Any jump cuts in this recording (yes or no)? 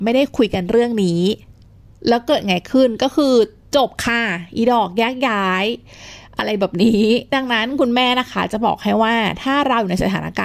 no